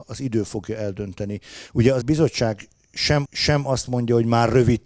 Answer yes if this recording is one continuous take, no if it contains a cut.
no